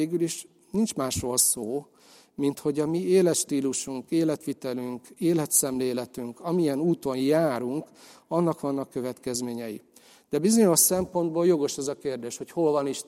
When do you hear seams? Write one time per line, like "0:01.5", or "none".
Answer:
none